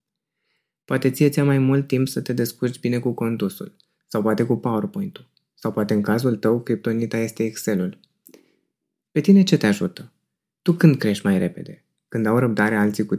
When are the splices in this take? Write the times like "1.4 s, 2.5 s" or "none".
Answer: none